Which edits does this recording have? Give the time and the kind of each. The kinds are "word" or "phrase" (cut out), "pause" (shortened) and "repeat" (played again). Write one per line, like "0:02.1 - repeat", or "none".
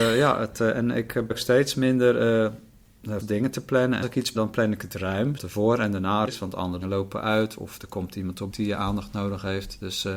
0:01.3 - word
0:03.2 - word
0:04.0 - word
0:04.3 - word
0:05.4 - word
0:06.3 - word
0:06.8 - word
0:08.5 - word